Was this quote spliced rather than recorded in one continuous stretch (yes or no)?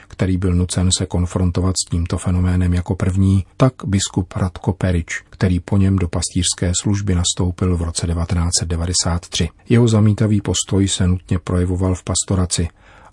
yes